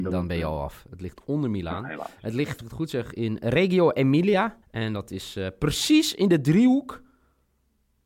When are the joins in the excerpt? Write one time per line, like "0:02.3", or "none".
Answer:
0:02.6
0:04.6